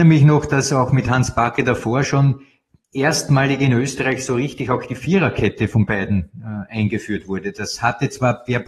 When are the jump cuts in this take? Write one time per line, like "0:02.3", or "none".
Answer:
none